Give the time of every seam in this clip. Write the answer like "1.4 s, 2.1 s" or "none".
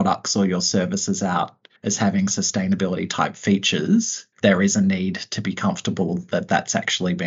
1.8 s, 4.3 s

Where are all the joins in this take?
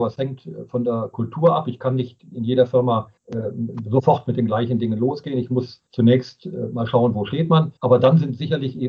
3.2 s, 5.9 s, 7.8 s

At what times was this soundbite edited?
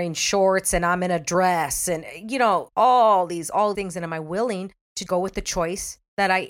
2.7 s, 3.7 s, 5.1 s

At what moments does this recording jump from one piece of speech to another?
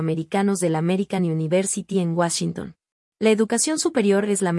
none

